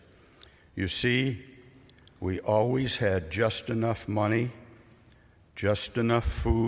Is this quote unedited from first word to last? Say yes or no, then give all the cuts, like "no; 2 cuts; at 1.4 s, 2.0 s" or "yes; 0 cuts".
yes; 0 cuts